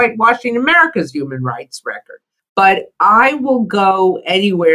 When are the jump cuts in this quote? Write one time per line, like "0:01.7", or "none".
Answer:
none

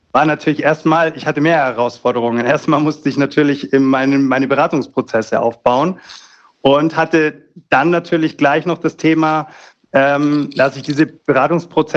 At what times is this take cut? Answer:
none

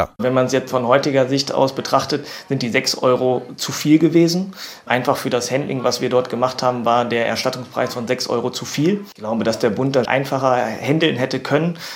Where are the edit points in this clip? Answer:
0:10.0

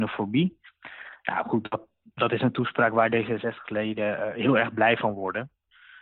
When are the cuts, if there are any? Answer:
none

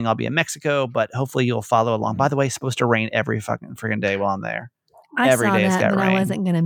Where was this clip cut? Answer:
none

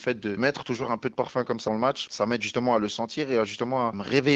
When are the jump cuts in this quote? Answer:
0:01.7

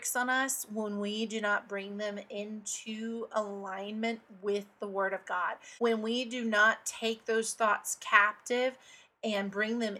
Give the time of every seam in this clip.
0:05.8

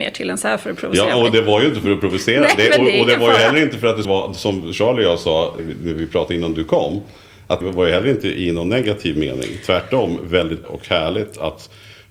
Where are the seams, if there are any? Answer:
0:04.0
0:05.6
0:07.6
0:10.6

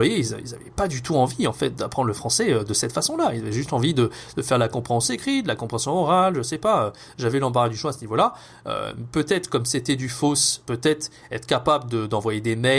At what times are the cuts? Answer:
none

